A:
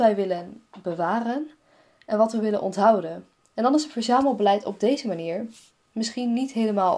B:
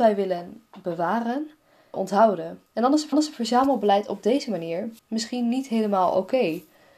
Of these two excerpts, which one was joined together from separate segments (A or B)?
B